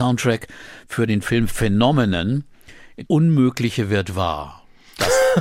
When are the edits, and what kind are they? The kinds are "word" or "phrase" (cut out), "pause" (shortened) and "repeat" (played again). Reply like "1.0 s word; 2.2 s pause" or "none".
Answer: 3.1 s phrase